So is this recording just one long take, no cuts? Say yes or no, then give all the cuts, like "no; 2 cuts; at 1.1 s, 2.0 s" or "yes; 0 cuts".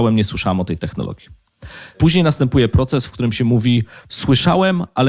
yes; 0 cuts